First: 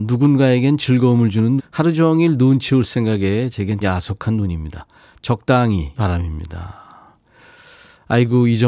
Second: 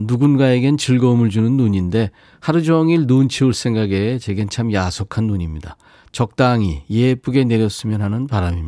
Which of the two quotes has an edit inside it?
first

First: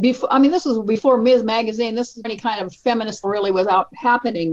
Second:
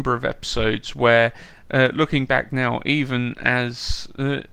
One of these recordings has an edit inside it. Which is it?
first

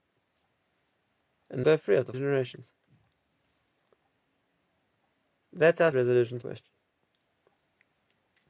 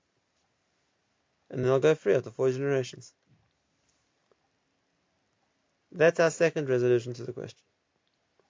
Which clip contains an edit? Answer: first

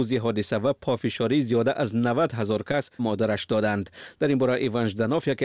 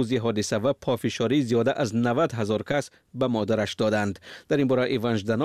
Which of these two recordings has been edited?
first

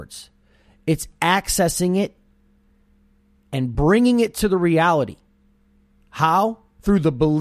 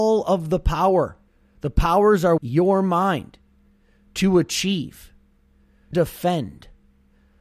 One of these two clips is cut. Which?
second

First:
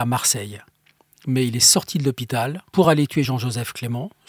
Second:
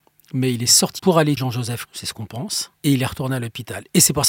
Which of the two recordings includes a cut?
second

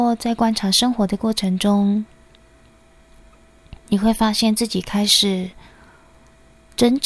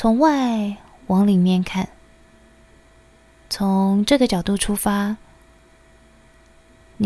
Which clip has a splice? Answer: first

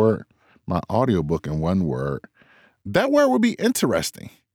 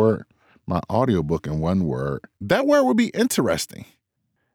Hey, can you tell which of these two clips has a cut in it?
second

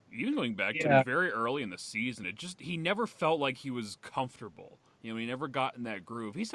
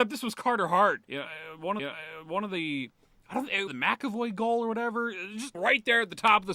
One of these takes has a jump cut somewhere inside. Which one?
second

